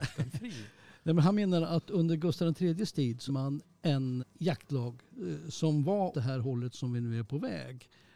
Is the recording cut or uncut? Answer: cut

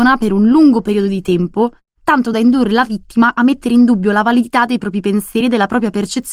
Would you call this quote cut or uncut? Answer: uncut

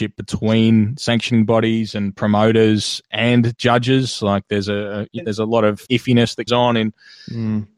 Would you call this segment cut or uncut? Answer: cut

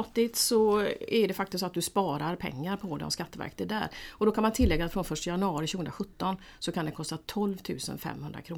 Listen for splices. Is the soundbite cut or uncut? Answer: uncut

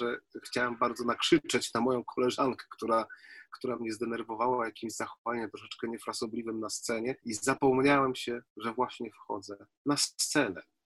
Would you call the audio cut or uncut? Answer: cut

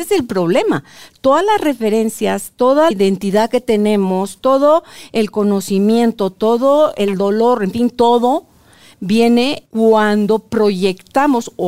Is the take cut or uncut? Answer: cut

